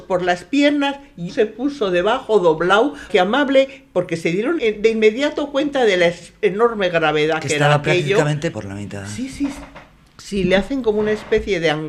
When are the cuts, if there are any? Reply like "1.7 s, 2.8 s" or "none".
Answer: 1.3 s, 3.1 s, 4.6 s, 8.5 s